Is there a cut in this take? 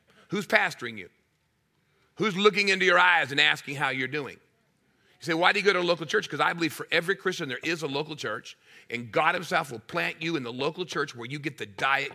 no; 0 cuts

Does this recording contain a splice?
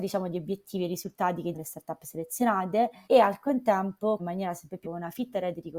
yes; 4 cuts; at 1.5 s, 3.0 s, 4.2 s, 4.8 s

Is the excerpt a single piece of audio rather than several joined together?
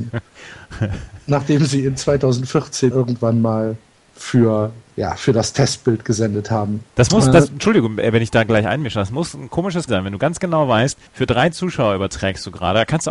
no; 5 cuts; at 2.9 s, 4.9 s, 6.9 s, 9.9 s, 11.1 s

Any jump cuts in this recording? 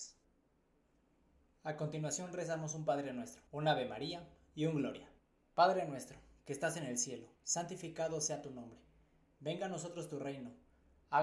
yes; 3 cuts; at 3.5 s, 5.2 s, 7.4 s

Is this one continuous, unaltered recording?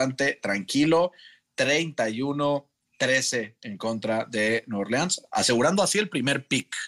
no; 1 cut; at 3.6 s

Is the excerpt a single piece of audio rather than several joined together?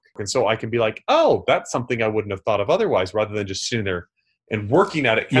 yes; 0 cuts

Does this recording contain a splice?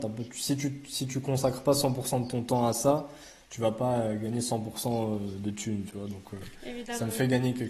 no; 0 cuts

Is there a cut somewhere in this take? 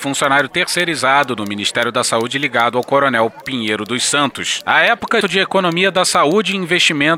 yes; 2 cuts; at 3.4 s, 5.2 s

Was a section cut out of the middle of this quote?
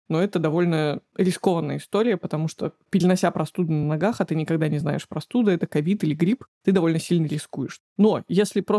no; 0 cuts

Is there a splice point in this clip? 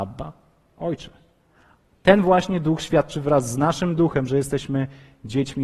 no; 0 cuts

